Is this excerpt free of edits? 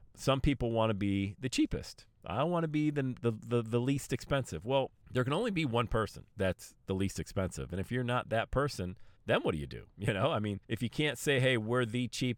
no; 5 cuts; at 5.0 s, 6.3 s, 9.2 s, 9.9 s, 10.6 s

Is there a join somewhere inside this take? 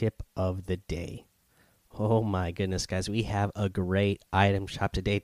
yes; 1 cut; at 1.5 s

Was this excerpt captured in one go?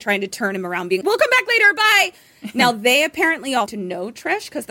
no; 2 cuts; at 1.0 s, 3.7 s

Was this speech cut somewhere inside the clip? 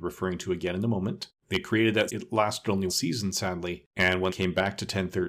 yes; 5 cuts; at 1.4 s, 2.1 s, 2.9 s, 3.9 s, 4.3 s

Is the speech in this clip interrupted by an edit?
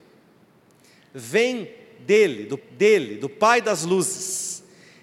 yes; 1 cut; at 2.6 s

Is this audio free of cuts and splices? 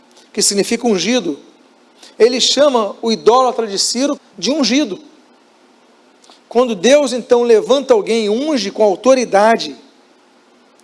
no; 1 cut; at 4.2 s

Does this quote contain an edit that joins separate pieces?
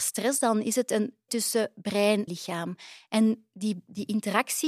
yes; 2 cuts; at 1.3 s, 2.3 s

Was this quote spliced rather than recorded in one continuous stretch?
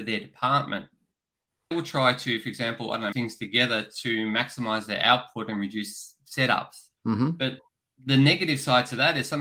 yes; 3 cuts; at 1.7 s, 3.1 s, 7.0 s

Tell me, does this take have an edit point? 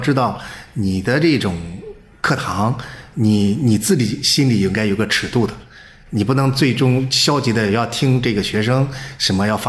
no; 0 cuts

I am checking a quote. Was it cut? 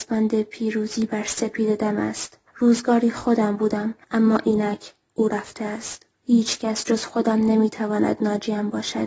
yes; 3 cuts; at 2.5 s, 4.0 s, 6.1 s

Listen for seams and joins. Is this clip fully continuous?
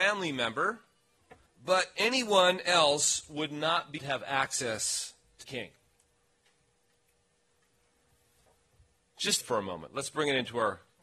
no; 4 cuts; at 1.5 s, 4.0 s, 5.4 s, 9.4 s

